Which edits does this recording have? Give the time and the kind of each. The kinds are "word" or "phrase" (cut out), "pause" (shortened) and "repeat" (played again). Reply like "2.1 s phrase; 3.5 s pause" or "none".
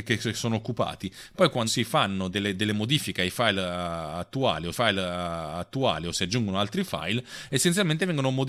1.7 s phrase; 2.3 s word; 4.7 s repeat